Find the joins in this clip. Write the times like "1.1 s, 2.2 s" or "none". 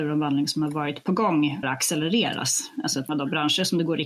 1.6 s, 3.1 s